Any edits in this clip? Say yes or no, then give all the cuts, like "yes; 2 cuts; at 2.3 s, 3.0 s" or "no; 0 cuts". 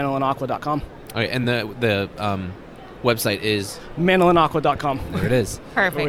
no; 0 cuts